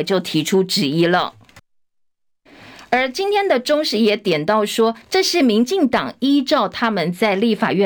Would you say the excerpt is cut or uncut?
cut